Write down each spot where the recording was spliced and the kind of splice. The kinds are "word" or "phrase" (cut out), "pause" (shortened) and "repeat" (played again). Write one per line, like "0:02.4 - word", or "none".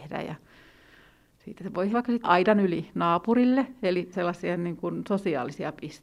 0:01.9 - word
0:02.2 - word
0:04.1 - word